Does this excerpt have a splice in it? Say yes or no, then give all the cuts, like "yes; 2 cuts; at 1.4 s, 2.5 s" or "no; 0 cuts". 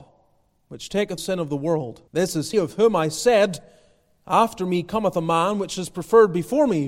yes; 3 cuts; at 1.2 s, 2.1 s, 2.5 s